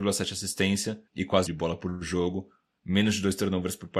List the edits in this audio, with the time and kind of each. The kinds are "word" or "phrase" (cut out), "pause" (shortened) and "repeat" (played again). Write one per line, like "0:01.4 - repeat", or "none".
0:01.1 - pause
0:01.5 - phrase